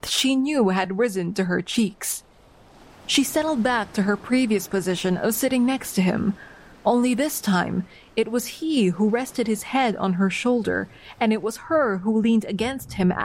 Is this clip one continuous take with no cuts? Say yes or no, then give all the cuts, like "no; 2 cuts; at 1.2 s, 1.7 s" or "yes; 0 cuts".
yes; 0 cuts